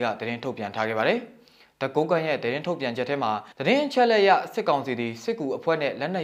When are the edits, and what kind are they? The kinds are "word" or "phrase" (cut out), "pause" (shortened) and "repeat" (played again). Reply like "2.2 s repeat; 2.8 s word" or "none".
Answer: 3.5 s pause